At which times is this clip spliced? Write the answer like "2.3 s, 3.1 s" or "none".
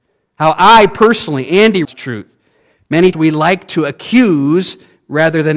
1.8 s, 3.1 s